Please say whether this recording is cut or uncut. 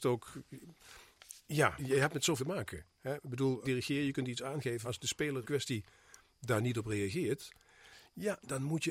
cut